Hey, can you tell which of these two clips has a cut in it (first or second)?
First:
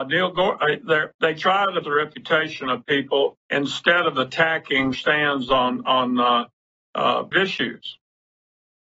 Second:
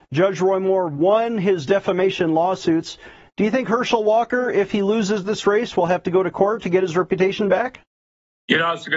first